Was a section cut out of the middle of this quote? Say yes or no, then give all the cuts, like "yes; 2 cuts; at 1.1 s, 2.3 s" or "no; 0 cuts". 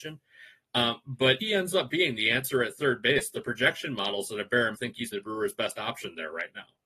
yes; 3 cuts; at 1.4 s, 4.7 s, 5.1 s